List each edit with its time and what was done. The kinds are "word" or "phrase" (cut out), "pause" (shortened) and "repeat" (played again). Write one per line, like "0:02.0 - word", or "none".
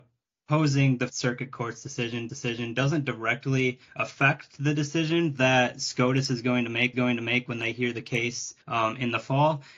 0:01.1 - word
0:02.3 - repeat
0:03.9 - pause
0:06.9 - repeat
0:08.6 - pause